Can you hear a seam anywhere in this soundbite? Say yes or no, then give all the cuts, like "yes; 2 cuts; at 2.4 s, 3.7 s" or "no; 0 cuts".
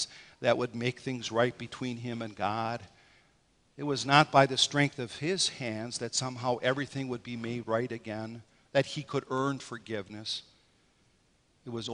no; 0 cuts